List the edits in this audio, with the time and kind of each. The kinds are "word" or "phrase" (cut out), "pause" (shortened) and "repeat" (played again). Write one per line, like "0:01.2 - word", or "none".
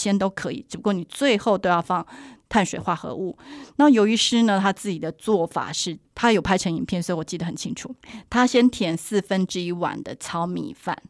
0:06.0 - pause